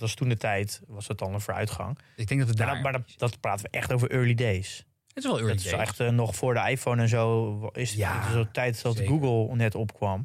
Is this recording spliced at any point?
no; 0 cuts

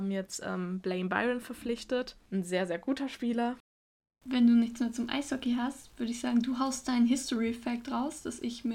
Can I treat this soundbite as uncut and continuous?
yes; 0 cuts

